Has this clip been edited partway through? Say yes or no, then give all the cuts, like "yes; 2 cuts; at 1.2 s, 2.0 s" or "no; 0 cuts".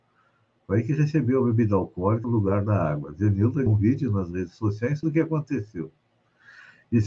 yes; 3 cuts; at 2.2 s, 3.7 s, 5.0 s